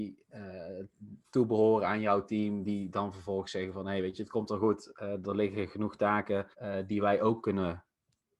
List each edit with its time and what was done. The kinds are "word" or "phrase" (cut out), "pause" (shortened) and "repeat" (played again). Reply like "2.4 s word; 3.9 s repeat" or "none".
1.2 s pause; 6.5 s pause